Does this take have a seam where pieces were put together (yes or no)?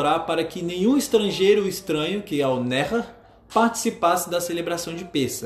no